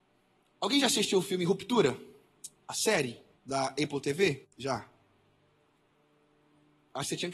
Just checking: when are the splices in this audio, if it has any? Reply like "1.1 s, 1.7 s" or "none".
3.4 s, 4.5 s